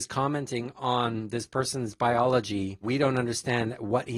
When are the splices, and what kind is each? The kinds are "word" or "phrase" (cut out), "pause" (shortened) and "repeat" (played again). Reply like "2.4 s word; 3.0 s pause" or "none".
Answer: 2.8 s word